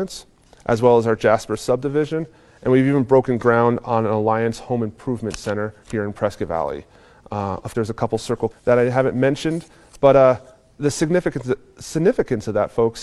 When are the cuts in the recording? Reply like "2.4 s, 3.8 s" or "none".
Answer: 5.8 s, 7.7 s, 8.5 s, 10.8 s